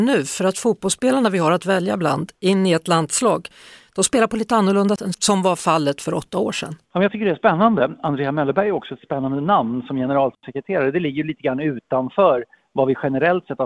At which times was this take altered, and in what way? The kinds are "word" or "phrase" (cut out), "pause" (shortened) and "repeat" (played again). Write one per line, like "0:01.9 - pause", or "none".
0:05.0 - word